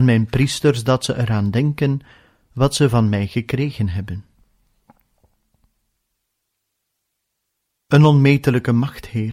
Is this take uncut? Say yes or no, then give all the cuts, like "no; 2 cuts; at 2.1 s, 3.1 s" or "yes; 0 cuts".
yes; 0 cuts